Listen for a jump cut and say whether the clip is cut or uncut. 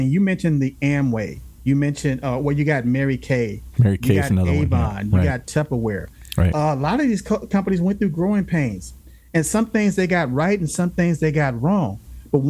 uncut